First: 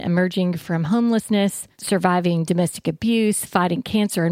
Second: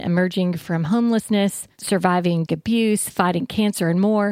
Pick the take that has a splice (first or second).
second